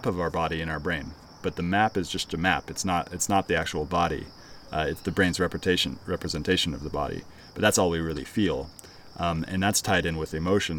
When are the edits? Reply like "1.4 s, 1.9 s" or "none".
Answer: none